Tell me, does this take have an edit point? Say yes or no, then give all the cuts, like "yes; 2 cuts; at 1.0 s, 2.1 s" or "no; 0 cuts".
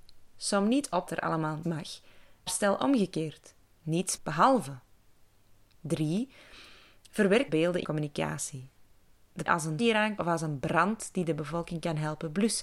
yes; 9 cuts; at 1.1 s, 1.6 s, 2.5 s, 4.2 s, 7.5 s, 7.8 s, 9.5 s, 9.8 s, 10.2 s